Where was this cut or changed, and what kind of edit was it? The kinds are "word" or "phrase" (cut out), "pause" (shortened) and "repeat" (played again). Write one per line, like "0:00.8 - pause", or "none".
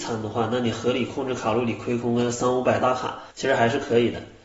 0:03.3 - pause